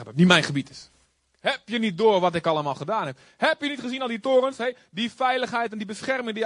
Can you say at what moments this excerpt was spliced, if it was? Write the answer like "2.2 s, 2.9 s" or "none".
1.0 s